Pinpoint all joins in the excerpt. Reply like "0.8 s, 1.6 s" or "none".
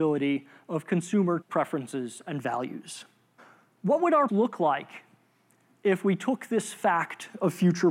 1.4 s, 3.4 s, 4.3 s